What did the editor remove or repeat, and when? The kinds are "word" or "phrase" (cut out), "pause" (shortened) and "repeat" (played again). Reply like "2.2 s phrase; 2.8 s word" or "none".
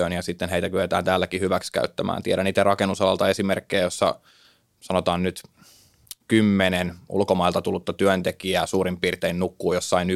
none